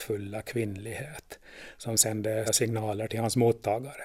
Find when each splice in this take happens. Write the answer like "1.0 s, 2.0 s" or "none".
2.4 s